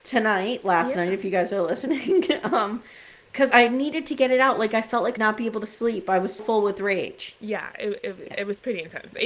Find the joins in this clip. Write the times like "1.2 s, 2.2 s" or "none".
3.5 s, 5.2 s, 6.4 s

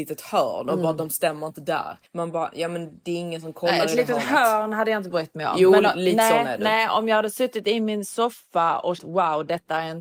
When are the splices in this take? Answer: 2.1 s, 9.0 s

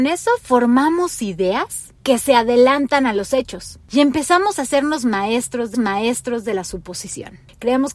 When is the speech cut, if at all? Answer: 5.7 s

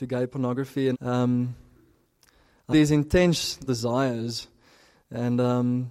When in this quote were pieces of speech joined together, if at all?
0.9 s, 2.7 s, 3.7 s

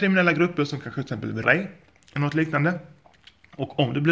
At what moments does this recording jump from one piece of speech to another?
1.4 s

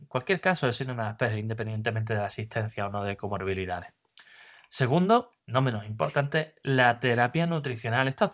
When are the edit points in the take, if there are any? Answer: 5.4 s

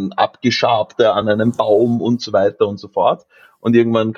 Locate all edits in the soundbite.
none

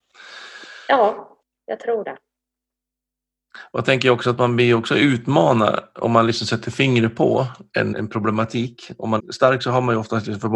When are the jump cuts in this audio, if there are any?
1.4 s, 7.9 s, 9.2 s

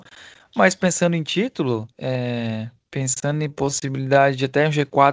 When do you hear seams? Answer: 1.9 s

